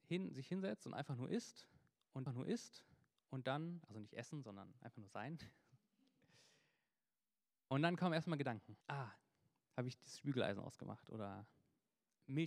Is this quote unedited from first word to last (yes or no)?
no